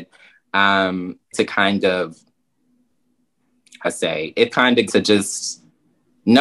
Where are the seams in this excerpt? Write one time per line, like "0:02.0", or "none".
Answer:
0:01.3
0:03.8
0:04.5
0:04.9